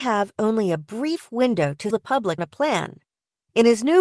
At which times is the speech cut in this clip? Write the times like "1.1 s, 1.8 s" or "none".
1.9 s, 2.4 s